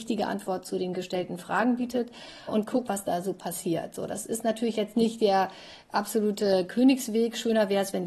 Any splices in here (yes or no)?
yes